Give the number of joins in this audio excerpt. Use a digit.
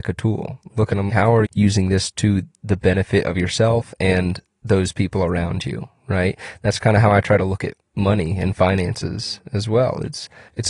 2